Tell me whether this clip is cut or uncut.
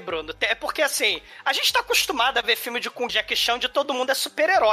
cut